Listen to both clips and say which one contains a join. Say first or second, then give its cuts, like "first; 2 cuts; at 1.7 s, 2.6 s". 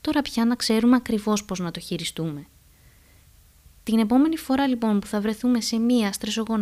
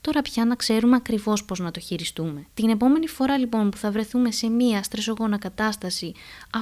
second; 1 cut; at 2.5 s